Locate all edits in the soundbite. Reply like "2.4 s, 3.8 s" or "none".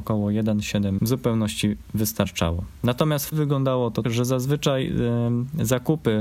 1.0 s, 3.3 s, 4.0 s